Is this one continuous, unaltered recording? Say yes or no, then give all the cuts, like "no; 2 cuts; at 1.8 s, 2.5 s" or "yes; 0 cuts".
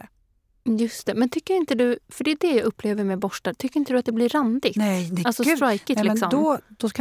yes; 0 cuts